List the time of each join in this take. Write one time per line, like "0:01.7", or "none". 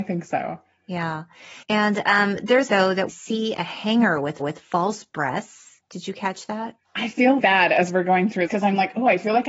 0:01.6
0:02.7
0:03.1
0:04.4
0:06.8
0:07.4
0:08.5